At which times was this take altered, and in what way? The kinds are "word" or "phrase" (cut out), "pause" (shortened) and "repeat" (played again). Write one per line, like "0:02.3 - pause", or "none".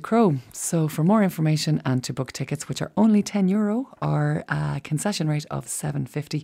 none